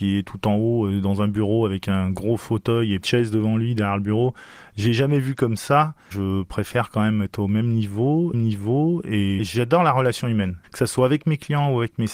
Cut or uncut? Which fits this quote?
cut